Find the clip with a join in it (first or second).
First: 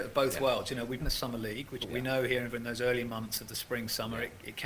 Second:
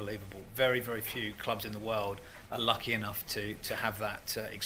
first